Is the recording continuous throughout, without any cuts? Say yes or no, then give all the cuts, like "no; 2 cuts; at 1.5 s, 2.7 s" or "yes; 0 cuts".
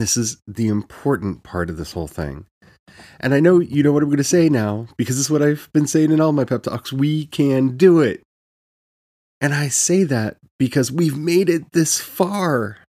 yes; 0 cuts